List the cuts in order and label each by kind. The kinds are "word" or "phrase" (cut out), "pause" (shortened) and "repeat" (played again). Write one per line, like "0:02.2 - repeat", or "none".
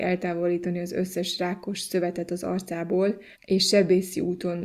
0:03.3 - pause